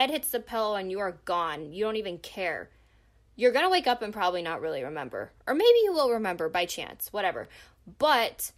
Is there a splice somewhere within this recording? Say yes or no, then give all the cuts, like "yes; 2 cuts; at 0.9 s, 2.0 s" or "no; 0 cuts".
no; 0 cuts